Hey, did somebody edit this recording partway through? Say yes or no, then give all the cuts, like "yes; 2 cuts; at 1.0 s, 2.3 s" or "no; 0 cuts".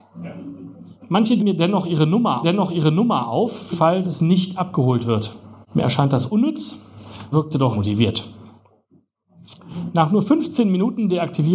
yes; 7 cuts; at 1.4 s, 2.4 s, 3.7 s, 4.0 s, 5.6 s, 7.3 s, 7.7 s